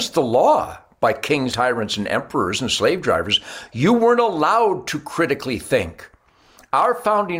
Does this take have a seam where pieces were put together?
yes; 1 cut; at 1.5 s

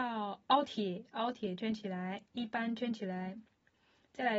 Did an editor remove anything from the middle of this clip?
yes; 1 cut; at 2.3 s

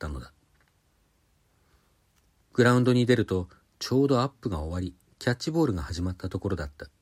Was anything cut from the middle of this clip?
no; 0 cuts

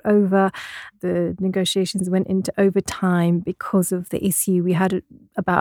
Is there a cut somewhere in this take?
no; 0 cuts

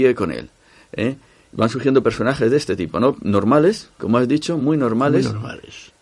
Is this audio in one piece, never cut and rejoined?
yes; 0 cuts

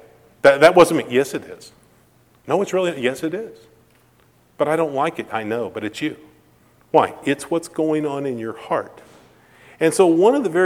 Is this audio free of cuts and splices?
yes; 0 cuts

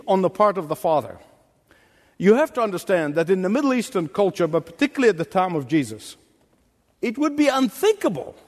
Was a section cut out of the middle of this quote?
no; 0 cuts

